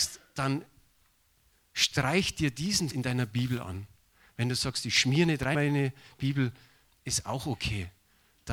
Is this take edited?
yes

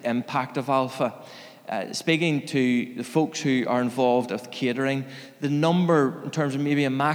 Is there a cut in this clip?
no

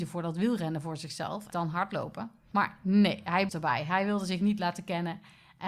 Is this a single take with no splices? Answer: no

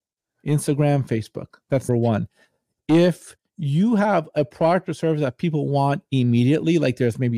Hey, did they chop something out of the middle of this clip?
yes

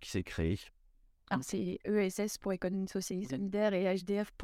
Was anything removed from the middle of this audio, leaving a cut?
no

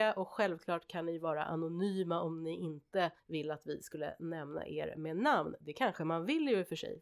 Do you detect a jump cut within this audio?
yes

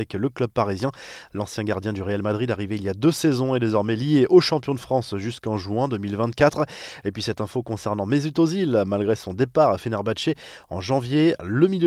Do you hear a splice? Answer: no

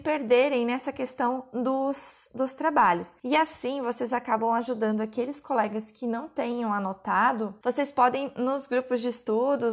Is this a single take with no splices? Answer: no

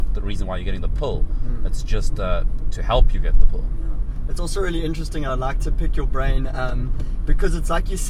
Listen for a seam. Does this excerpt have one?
no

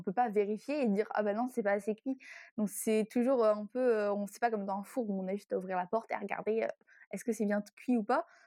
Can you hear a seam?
no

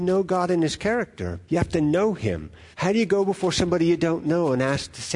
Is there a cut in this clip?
yes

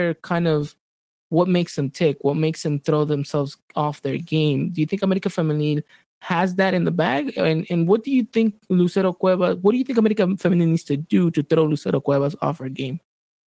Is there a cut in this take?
no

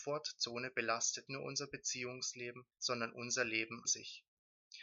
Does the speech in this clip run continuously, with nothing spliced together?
no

